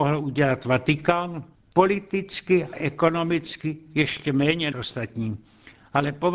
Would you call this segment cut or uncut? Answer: cut